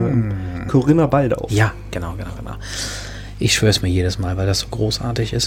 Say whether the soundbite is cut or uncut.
uncut